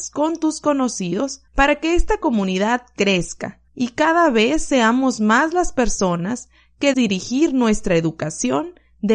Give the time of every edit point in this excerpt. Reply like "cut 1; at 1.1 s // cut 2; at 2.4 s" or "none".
cut 1; at 1.5 s // cut 2; at 3.7 s // cut 3; at 6.9 s